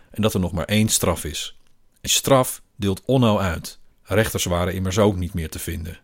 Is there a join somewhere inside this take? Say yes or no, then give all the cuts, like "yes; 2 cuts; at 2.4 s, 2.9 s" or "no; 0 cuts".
yes; 2 cuts; at 2.1 s, 3.9 s